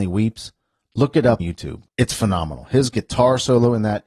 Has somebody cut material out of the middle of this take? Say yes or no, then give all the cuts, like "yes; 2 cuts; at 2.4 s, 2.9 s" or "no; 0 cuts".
yes; 2 cuts; at 1.4 s, 1.9 s